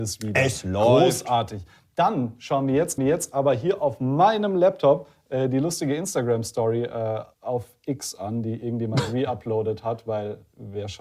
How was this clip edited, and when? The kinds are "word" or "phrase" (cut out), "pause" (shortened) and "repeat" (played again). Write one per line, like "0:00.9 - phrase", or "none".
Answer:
0:03.0 - repeat
0:07.3 - pause